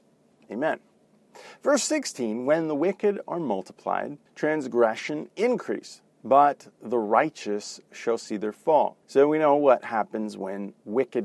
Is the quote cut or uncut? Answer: cut